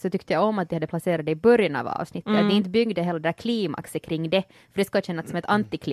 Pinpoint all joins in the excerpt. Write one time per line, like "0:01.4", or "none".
none